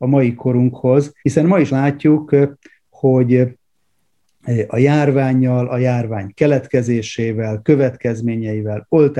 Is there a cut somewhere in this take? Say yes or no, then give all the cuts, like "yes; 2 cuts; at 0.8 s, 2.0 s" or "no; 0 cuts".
yes; 2 cuts; at 1.2 s, 1.7 s